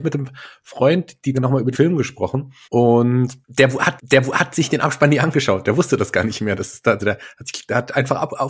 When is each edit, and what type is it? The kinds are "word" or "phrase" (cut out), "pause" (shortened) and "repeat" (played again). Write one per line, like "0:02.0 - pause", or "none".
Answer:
0:01.3 - word
0:01.7 - word
0:02.6 - pause
0:04.0 - repeat
0:07.0 - word